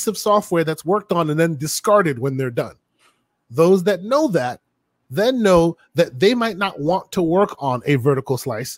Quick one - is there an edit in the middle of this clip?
no; 0 cuts

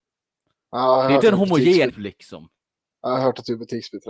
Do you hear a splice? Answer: yes; 2 cuts; at 1.2 s, 1.9 s

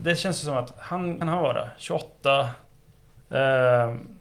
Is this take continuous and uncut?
no; 1 cut; at 1.2 s

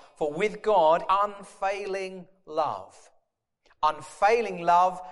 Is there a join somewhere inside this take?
yes; 1 cut; at 1.1 s

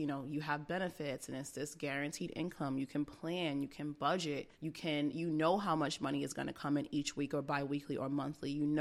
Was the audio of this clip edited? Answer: yes; 1 cut; at 4.5 s

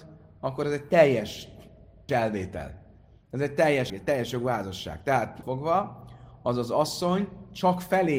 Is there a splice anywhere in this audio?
yes; 3 cuts; at 2.1 s, 3.9 s, 5.4 s

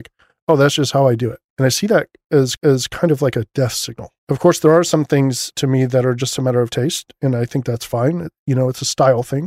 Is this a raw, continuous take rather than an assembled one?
no; 3 cuts; at 1.5 s, 2.6 s, 4.2 s

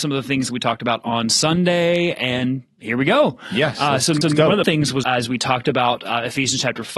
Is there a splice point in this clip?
yes; 3 cuts; at 4.2 s, 4.6 s, 5.0 s

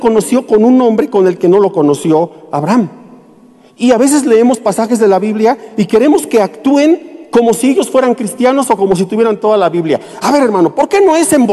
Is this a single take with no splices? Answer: yes; 0 cuts

